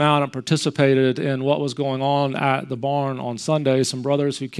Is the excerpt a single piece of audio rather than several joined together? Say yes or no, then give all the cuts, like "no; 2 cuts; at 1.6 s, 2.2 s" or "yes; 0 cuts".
yes; 0 cuts